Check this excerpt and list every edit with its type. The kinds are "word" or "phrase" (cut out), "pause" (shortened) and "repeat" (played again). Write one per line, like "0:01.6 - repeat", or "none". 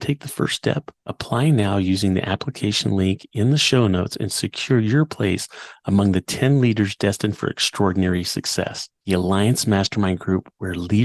0:01.0 - pause
0:09.0 - pause